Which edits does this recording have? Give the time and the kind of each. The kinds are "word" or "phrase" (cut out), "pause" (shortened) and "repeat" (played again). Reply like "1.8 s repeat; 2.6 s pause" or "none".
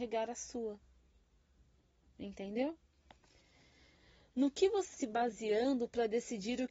4.9 s word